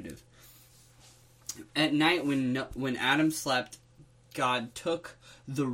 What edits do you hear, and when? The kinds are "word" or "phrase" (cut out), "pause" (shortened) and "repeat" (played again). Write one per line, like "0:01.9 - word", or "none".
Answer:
none